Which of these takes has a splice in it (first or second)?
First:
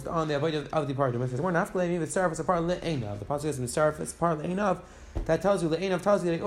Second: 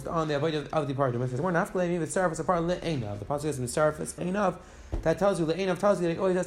second